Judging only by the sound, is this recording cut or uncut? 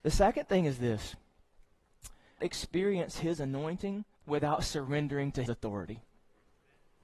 cut